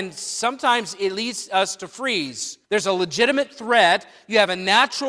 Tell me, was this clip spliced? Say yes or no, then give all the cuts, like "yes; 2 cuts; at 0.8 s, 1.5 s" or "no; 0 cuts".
yes; 1 cut; at 2.6 s